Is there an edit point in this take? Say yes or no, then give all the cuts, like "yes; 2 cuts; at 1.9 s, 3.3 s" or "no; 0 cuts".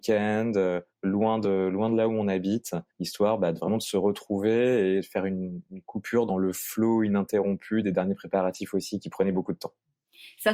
yes; 2 cuts; at 0.9 s, 2.9 s